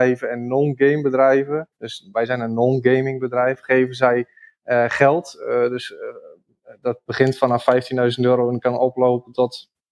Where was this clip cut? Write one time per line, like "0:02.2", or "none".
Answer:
0:01.7